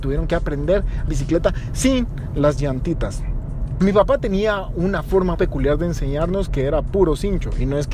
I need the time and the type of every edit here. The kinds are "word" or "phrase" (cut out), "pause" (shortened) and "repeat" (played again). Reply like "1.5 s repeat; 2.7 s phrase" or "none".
1.1 s phrase; 5.3 s word